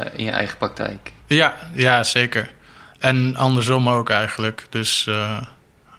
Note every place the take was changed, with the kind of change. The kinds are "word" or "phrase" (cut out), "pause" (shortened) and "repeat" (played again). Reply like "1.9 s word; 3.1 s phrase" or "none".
1.2 s pause